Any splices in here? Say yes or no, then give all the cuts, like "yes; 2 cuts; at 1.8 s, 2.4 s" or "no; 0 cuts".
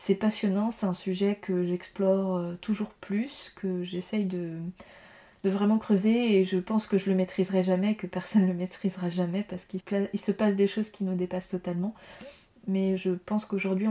yes; 1 cut; at 9.8 s